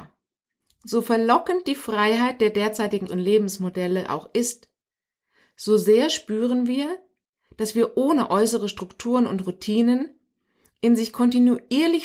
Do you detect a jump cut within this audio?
yes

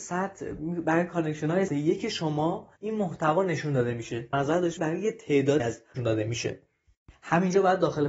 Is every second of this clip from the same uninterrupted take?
no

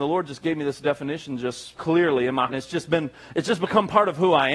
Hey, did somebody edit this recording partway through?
yes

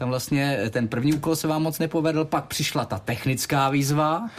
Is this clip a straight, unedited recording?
yes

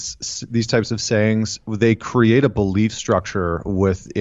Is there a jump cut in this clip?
no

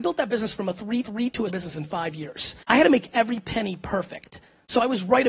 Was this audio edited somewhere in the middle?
yes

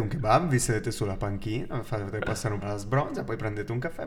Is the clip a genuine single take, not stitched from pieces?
no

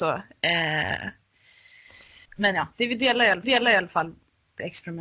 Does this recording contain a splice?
yes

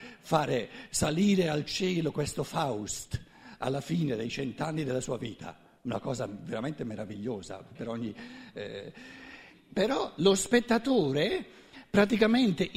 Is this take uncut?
no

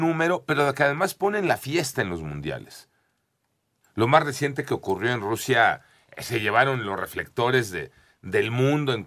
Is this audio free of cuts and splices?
yes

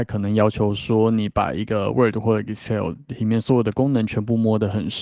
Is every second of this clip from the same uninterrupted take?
yes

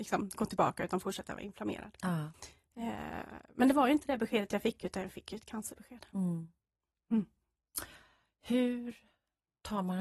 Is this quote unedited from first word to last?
yes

